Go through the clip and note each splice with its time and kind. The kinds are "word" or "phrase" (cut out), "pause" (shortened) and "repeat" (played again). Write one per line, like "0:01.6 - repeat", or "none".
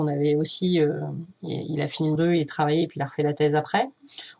0:02.2 - word
0:02.5 - word